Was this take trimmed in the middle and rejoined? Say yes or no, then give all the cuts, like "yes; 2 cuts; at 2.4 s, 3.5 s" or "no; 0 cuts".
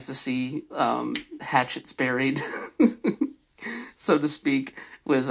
no; 0 cuts